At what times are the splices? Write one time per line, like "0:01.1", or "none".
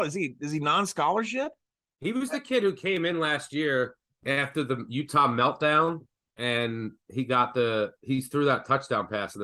none